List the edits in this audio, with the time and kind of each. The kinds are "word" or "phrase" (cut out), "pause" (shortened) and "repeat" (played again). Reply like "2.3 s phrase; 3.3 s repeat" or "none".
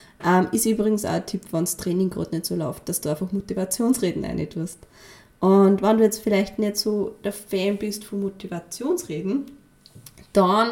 none